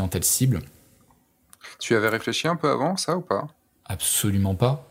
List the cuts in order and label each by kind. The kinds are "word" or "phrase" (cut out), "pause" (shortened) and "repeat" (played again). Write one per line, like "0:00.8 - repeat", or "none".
none